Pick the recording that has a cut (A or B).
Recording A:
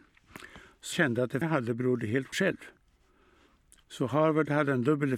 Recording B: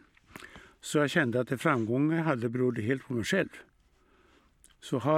A